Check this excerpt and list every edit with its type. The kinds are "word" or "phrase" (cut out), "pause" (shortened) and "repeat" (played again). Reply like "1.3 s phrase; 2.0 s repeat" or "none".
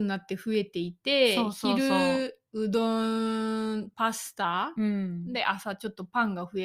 none